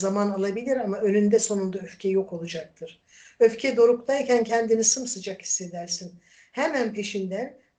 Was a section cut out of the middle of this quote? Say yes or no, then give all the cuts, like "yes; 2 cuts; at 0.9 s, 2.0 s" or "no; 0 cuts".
no; 0 cuts